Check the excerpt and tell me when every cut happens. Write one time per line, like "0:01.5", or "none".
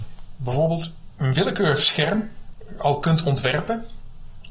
none